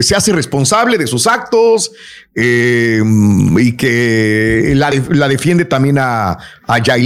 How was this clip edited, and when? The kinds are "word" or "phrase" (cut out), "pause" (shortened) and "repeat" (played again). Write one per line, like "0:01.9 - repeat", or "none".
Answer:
none